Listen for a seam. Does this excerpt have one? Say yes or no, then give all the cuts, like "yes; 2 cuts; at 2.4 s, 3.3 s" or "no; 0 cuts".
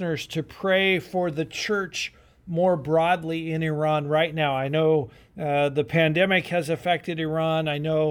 no; 0 cuts